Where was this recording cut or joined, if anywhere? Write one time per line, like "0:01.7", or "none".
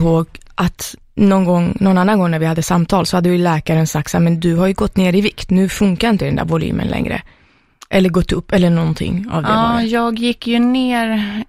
none